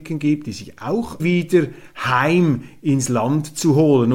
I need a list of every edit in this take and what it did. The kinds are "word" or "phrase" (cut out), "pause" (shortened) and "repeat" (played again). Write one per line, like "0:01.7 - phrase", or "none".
0:01.2 - phrase